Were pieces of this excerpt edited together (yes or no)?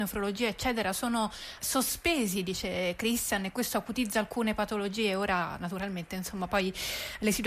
yes